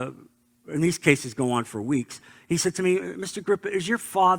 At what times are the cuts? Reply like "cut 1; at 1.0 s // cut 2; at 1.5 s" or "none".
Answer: none